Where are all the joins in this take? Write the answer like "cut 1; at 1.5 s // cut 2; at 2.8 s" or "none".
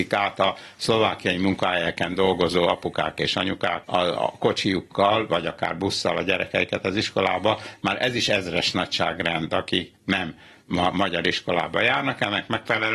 cut 1; at 3.8 s